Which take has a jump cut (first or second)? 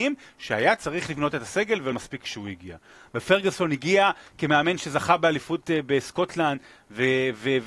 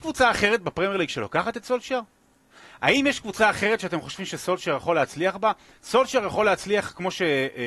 first